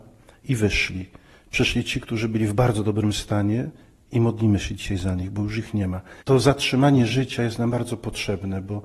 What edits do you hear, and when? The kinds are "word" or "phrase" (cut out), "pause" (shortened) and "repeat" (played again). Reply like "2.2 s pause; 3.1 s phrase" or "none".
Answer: none